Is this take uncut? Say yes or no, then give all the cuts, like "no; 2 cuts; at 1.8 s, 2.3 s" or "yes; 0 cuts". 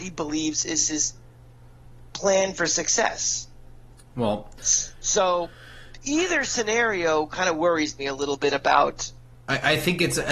yes; 0 cuts